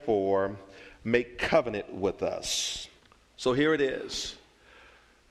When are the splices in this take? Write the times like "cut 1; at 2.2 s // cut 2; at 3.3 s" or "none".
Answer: cut 1; at 3.0 s